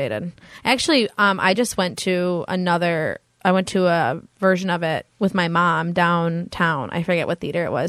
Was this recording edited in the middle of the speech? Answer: no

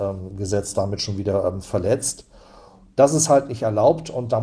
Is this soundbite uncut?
yes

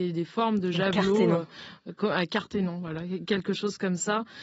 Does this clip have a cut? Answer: no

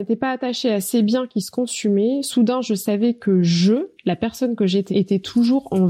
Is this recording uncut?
no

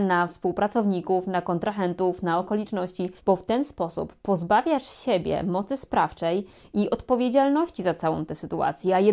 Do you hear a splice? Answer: yes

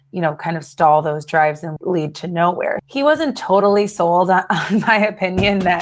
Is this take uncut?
no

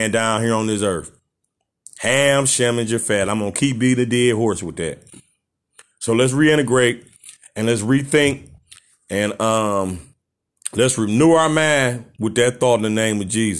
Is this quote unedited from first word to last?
yes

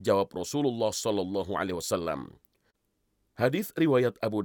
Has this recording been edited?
no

